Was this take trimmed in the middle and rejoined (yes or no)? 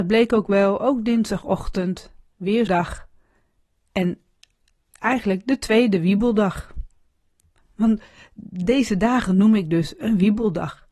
yes